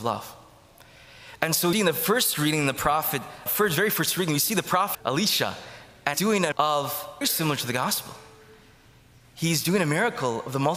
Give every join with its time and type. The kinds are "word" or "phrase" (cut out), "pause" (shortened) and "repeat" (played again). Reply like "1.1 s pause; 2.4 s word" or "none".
1.7 s word; 3.5 s word; 4.9 s word; 6.1 s word; 6.5 s word; 7.2 s word